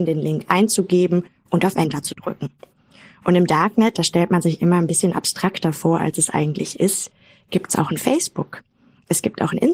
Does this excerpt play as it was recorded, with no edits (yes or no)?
yes